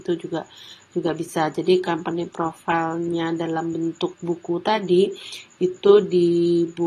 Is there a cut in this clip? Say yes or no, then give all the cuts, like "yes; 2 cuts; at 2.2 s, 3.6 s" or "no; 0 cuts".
no; 0 cuts